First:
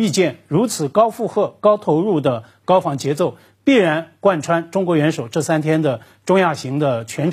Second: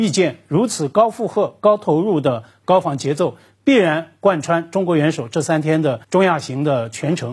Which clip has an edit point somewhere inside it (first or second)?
second